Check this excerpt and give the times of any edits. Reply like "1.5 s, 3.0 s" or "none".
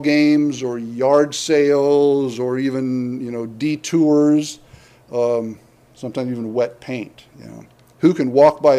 none